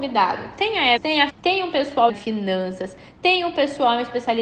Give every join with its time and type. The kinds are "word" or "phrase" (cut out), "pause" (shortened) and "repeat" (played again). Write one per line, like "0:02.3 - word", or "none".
0:01.0 - word
0:01.3 - word
0:02.1 - word